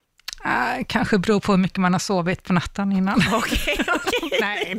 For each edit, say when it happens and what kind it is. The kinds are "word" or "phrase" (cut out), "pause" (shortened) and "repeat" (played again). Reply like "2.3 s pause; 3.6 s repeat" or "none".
none